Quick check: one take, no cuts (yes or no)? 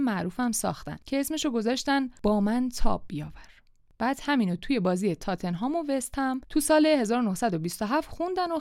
yes